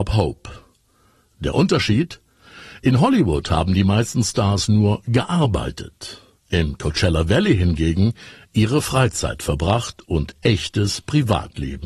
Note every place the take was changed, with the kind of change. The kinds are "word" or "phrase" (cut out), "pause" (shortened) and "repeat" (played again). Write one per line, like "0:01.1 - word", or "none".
none